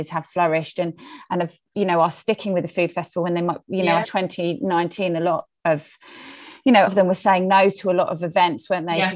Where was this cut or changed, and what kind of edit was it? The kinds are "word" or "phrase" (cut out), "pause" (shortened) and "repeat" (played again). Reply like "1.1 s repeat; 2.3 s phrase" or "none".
4.0 s phrase; 6.9 s phrase